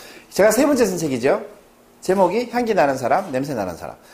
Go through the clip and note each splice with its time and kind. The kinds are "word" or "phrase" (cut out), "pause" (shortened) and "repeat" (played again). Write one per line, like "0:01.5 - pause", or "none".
none